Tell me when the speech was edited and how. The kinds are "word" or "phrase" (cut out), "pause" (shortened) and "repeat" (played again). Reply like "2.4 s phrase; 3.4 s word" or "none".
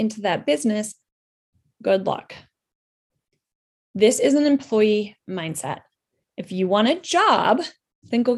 none